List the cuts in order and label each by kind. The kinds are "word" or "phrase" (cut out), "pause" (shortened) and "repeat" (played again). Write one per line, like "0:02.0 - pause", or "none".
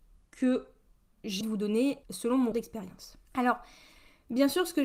0:01.4 - word
0:02.0 - pause
0:02.5 - word
0:03.3 - pause